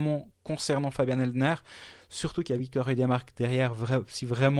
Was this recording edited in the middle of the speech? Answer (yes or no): no